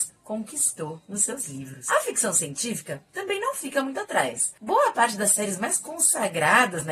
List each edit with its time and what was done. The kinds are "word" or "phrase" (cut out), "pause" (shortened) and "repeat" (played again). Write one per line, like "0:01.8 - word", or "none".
0:04.6 - pause